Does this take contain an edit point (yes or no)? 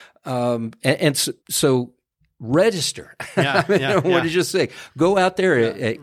yes